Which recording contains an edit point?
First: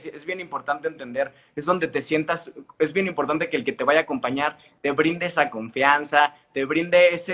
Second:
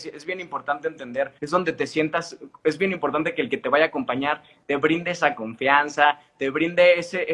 second; 1 cut; at 1.4 s

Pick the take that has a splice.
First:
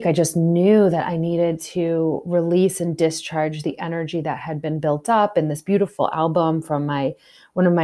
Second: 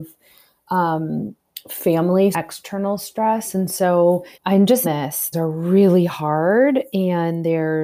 second; 4 cuts; at 2.3 s, 4.3 s, 4.8 s, 5.3 s

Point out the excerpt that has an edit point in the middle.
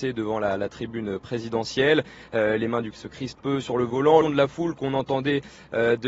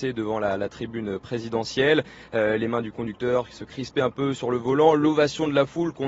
first; 3 cuts; at 2.9 s, 3.4 s, 4.2 s

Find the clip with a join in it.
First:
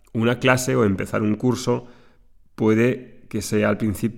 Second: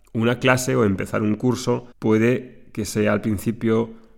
second; 1 cut; at 1.9 s

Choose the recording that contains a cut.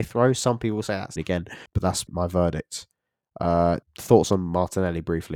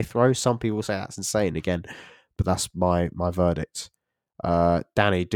first; 4 cuts; at 1.2 s, 1.7 s, 2.1 s, 3.8 s

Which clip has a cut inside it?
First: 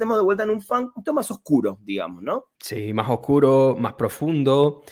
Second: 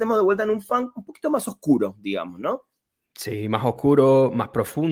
first; 2 cuts; at 1.1 s, 2.5 s

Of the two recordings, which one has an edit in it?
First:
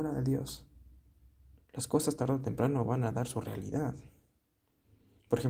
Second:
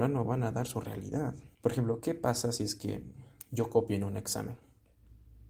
second; 1 cut; at 1.5 s

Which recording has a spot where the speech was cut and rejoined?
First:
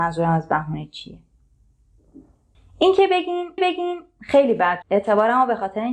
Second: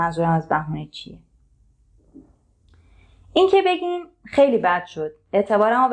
first; 3 cuts; at 2.5 s, 3.6 s, 4.8 s

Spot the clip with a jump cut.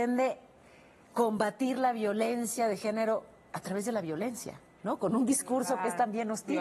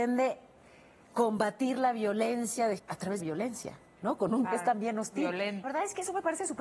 second; 4 cuts; at 2.8 s, 3.2 s, 4.4 s, 5.6 s

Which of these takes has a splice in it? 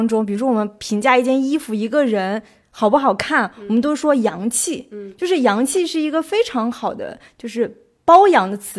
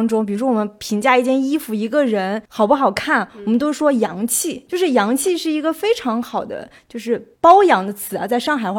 second; 3 cuts; at 2.5 s, 4.7 s, 7.4 s

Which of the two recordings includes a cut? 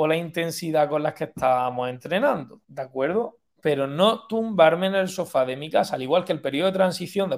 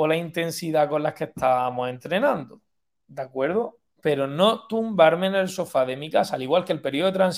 first; 1 cut; at 2.6 s

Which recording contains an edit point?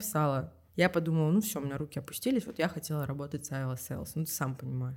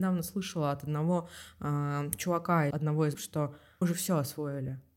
second; 3 cuts; at 2.7 s, 3.1 s, 3.8 s

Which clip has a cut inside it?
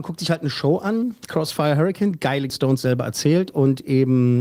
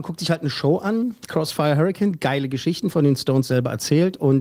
first; 1 cut; at 2.5 s

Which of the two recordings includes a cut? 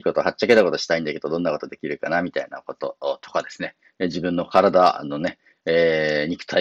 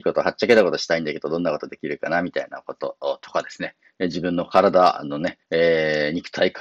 second; 1 cut; at 5.4 s

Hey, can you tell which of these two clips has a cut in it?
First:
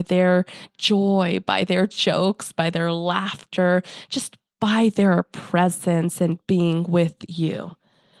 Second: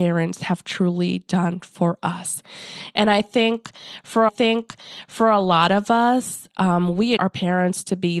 second; 2 cuts; at 4.3 s, 7.2 s

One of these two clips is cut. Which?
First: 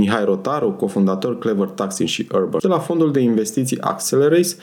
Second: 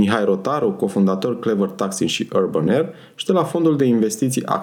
first; 1 cut; at 2.6 s

